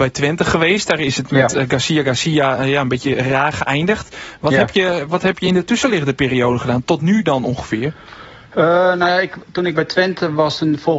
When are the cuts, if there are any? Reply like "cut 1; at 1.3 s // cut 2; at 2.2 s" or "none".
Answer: none